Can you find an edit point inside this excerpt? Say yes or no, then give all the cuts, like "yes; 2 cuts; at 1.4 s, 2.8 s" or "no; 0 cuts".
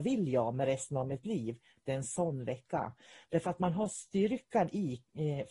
no; 0 cuts